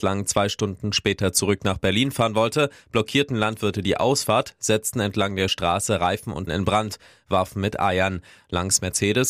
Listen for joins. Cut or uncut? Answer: cut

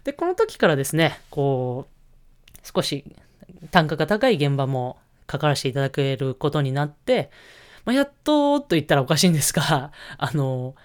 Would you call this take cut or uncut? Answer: uncut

